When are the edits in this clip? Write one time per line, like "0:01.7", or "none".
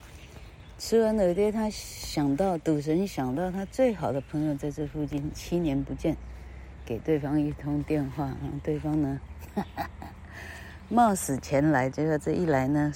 0:11.9